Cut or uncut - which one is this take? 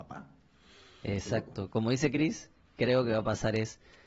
uncut